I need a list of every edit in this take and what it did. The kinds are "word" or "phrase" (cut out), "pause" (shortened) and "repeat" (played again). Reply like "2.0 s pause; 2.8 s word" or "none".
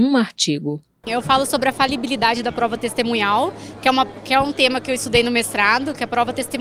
none